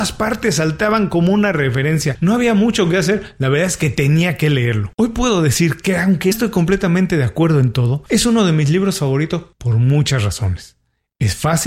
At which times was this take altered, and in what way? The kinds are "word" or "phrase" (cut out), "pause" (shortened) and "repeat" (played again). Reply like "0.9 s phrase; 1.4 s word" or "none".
4.9 s pause; 6.3 s word; 9.5 s pause